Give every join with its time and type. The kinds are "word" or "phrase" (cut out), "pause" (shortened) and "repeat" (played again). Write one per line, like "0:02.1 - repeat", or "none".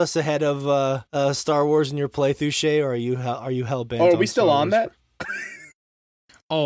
0:01.1 - pause
0:05.0 - pause